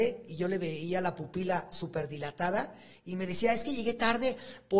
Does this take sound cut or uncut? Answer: uncut